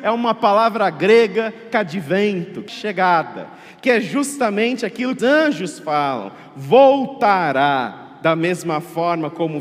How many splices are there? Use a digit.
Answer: 3